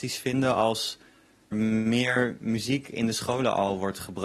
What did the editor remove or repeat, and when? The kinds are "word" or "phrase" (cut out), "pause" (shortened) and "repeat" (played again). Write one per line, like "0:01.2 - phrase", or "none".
0:01.5 - word